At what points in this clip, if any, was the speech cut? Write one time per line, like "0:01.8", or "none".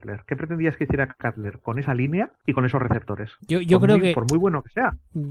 none